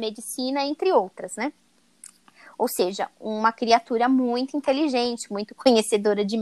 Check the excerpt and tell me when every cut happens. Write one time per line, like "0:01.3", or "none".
none